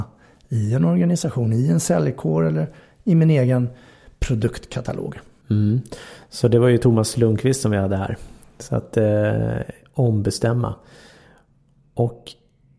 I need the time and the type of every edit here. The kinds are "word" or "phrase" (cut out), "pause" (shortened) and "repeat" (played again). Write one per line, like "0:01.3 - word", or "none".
none